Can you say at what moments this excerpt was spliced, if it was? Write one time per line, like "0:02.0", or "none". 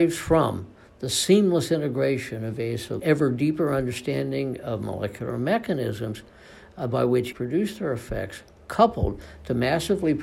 0:03.0
0:07.3